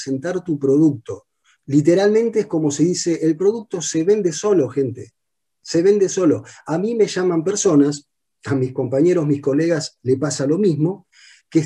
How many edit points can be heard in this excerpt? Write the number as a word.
zero